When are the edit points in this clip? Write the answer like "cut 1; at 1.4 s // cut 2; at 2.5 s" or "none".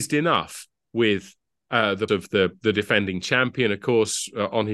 cut 1; at 2.1 s